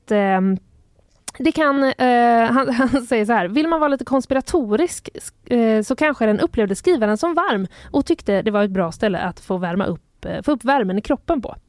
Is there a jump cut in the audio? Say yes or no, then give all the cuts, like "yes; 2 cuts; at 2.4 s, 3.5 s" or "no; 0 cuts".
no; 0 cuts